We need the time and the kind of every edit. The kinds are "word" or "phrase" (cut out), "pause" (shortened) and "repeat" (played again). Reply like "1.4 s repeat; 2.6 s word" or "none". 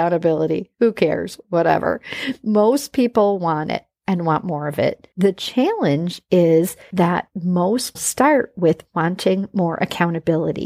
5.1 s pause; 7.9 s word